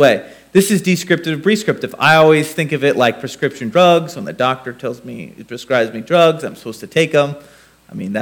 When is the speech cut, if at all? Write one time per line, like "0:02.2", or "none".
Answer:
none